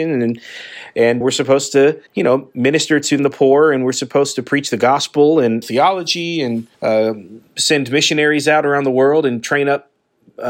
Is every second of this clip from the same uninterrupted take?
no; 5 cuts; at 1.2 s, 2.1 s, 3.2 s, 5.6 s, 6.7 s

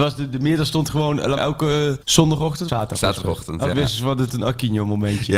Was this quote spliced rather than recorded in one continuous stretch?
yes; 5 cuts; at 1.4 s, 2.0 s, 2.7 s, 3.7 s, 4.3 s

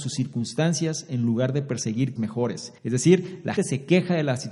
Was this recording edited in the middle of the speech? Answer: yes; 3 cuts; at 2.2 s, 2.8 s, 3.6 s

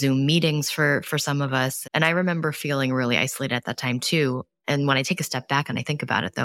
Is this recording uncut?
no; 1 cut; at 1.8 s

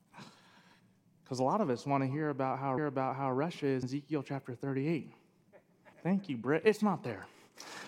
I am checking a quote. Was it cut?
yes; 3 cuts; at 2.8 s, 3.8 s, 5.9 s

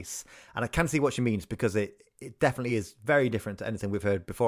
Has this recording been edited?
no; 0 cuts

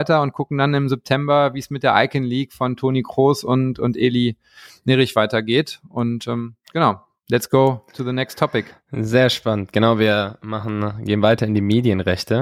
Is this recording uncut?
yes; 0 cuts

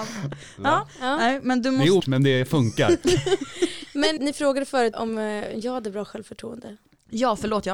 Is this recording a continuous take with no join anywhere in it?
no; 3 cuts; at 2.0 s, 4.2 s, 4.9 s

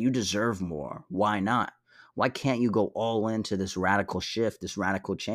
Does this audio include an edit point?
no; 0 cuts

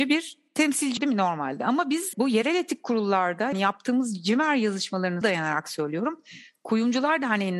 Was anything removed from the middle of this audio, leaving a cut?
yes; 4 cuts; at 1.0 s, 2.1 s, 3.5 s, 5.2 s

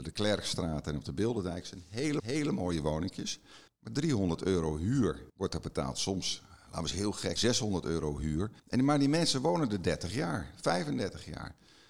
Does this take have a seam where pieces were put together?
yes; 5 cuts; at 2.2 s, 3.7 s, 5.3 s, 7.4 s, 8.6 s

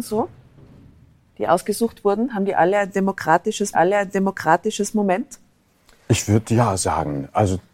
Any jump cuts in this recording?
yes; 1 cut; at 3.7 s

